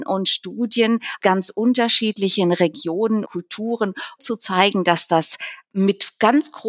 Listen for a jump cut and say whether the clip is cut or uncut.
cut